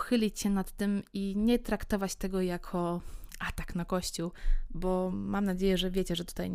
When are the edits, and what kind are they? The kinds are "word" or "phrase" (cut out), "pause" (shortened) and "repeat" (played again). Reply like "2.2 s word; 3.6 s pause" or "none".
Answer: none